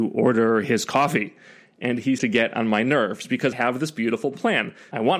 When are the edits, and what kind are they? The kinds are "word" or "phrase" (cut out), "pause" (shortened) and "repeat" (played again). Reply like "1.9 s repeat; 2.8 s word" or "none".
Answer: 2.2 s word; 3.5 s word